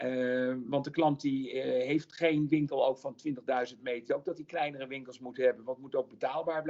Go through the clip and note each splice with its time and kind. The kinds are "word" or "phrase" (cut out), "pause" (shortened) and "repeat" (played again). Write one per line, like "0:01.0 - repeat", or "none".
0:04.1 - word